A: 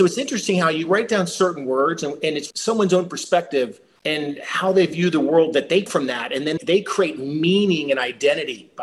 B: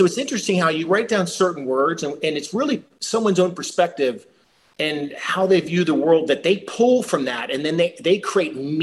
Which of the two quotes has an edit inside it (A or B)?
A